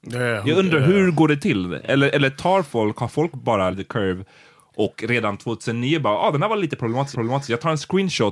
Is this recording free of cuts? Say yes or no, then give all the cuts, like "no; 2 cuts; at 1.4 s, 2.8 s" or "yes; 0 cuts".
no; 3 cuts; at 3.3 s, 3.7 s, 7.1 s